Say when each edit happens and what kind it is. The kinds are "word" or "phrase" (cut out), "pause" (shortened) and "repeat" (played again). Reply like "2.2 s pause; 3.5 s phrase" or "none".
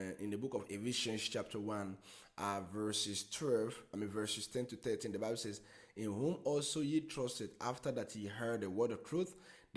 none